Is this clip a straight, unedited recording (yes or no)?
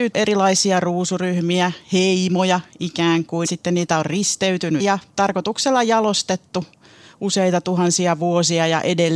no